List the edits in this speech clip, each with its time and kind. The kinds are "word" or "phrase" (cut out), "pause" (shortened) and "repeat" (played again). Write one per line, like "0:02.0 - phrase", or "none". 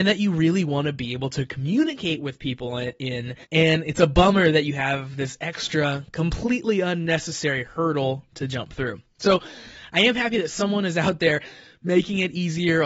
0:03.4 - pause